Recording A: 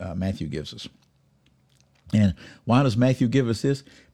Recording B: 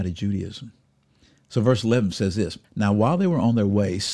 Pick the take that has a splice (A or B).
B